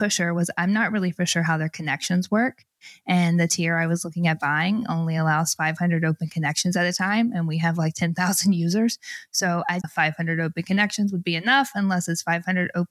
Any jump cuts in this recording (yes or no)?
yes